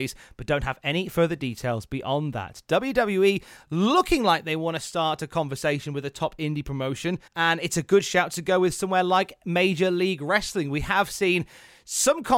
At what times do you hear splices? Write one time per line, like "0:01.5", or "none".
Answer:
0:07.3